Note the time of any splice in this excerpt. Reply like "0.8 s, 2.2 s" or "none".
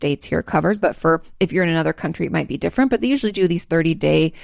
none